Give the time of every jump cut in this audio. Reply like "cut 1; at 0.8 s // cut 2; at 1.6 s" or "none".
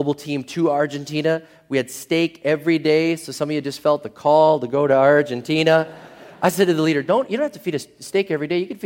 none